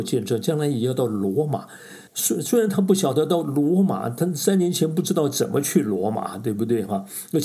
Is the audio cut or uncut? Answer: cut